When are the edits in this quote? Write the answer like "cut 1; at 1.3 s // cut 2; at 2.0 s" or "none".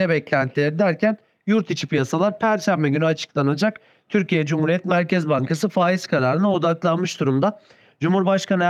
none